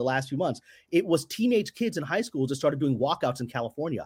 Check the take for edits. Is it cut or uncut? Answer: uncut